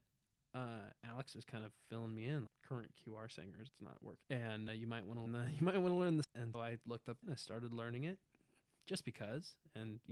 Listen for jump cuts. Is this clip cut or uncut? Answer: cut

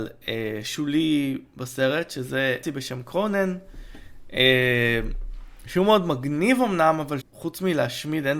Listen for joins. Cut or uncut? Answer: cut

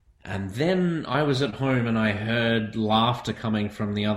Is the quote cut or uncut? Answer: uncut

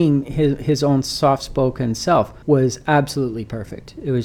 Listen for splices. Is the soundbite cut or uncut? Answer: cut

